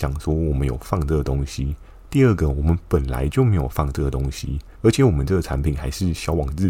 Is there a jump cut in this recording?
yes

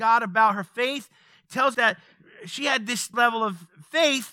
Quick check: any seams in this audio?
yes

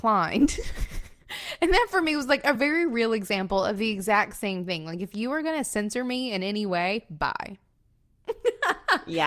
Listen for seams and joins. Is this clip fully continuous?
yes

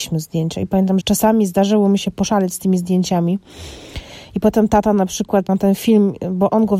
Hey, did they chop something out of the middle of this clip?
yes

